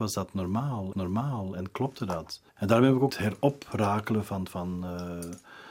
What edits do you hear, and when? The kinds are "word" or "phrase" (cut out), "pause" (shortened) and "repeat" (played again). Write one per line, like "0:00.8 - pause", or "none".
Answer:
0:00.9 - repeat
0:02.5 - pause
0:03.1 - phrase

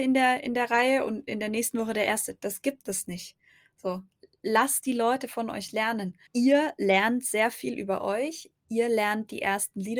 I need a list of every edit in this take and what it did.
0:06.3 - pause

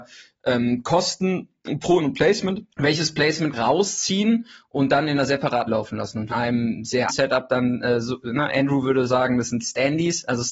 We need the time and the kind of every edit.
0:02.0 - word
0:02.7 - pause
0:03.5 - phrase
0:05.7 - word
0:06.3 - phrase
0:07.1 - word

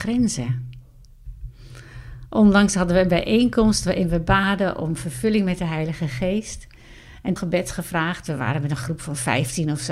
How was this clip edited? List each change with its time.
0:07.4 - phrase

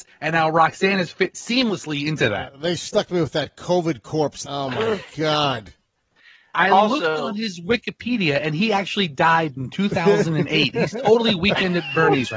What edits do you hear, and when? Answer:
none

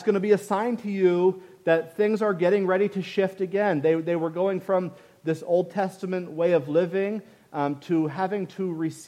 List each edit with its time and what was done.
none

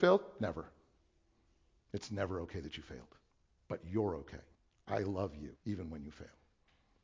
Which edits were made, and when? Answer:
0:03.3 - pause
0:04.5 - pause
0:05.6 - pause

